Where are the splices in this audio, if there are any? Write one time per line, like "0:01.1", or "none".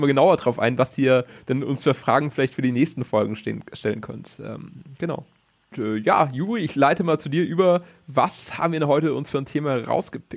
none